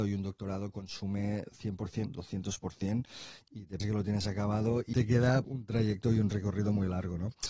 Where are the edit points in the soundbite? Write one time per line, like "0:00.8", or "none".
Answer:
0:02.1
0:03.8
0:04.9
0:05.4